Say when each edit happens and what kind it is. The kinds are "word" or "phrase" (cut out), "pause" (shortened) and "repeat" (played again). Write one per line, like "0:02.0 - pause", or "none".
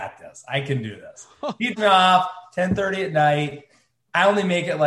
0:01.8 - word